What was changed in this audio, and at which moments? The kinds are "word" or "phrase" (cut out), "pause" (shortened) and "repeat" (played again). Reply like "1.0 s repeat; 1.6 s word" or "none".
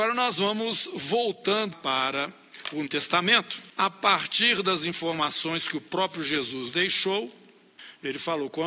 1.7 s word; 2.9 s word; 6.7 s word